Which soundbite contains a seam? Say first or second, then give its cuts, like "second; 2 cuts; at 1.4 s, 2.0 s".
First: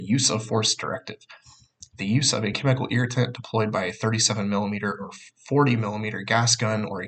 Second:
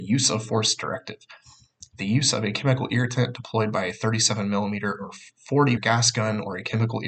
second; 1 cut; at 5.8 s